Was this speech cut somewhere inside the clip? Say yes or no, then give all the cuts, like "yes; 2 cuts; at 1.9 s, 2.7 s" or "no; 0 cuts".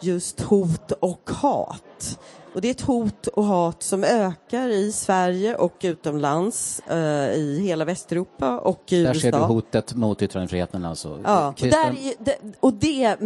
yes; 1 cut; at 11.6 s